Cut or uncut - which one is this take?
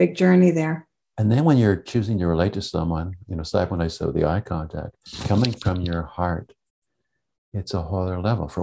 uncut